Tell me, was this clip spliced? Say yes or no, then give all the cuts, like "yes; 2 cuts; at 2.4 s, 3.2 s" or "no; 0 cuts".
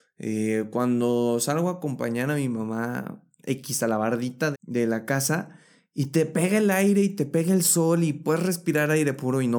yes; 1 cut; at 4.5 s